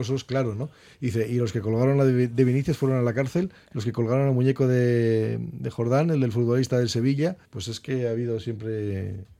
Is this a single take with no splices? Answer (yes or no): no